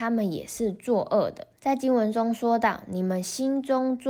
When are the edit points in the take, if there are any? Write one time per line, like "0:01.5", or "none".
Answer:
0:01.6